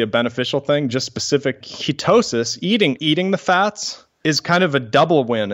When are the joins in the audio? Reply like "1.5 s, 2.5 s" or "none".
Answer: 1.6 s, 3.0 s